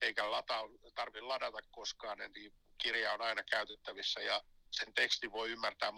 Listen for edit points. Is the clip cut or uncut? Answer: uncut